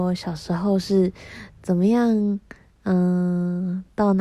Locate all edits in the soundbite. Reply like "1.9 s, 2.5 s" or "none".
none